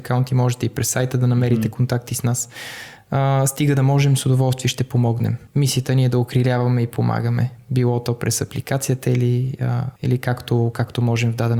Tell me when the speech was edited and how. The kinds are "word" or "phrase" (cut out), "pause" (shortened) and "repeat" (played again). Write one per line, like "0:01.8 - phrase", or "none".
0:05.5 - pause
0:10.0 - pause